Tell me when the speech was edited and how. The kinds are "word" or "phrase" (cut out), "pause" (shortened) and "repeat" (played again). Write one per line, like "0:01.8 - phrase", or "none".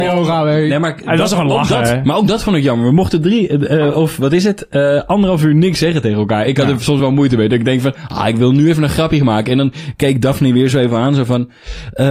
none